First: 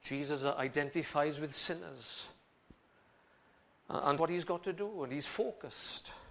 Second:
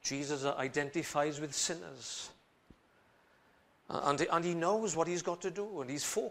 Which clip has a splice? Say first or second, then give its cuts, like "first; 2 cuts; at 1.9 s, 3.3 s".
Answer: first; 1 cut; at 4.2 s